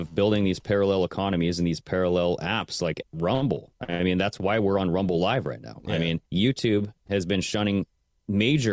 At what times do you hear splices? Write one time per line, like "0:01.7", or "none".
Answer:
0:03.8
0:06.3